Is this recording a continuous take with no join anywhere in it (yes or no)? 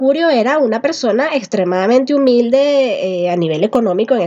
yes